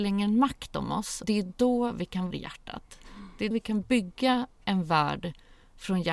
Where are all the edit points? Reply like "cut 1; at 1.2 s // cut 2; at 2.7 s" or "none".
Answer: cut 1; at 1.2 s // cut 2; at 2.3 s // cut 3; at 3.5 s